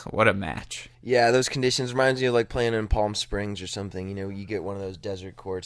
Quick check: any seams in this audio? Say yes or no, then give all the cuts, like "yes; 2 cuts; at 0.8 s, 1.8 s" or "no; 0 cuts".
yes; 1 cut; at 0.9 s